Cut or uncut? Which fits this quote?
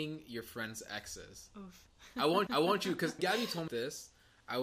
cut